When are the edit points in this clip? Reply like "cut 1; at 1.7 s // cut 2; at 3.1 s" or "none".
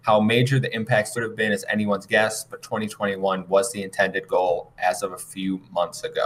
cut 1; at 1.2 s